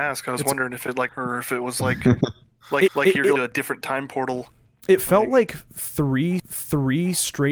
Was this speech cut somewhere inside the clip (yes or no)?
yes